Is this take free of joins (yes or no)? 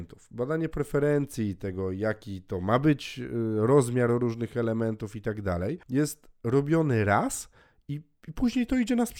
yes